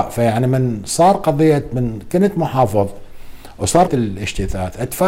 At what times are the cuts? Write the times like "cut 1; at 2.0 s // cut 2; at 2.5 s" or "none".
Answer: cut 1; at 3.9 s